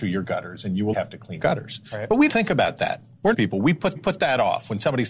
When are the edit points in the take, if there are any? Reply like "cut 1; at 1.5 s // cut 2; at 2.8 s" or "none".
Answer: cut 1; at 0.9 s // cut 2; at 1.4 s // cut 3; at 2.3 s // cut 4; at 3.3 s // cut 5; at 4.0 s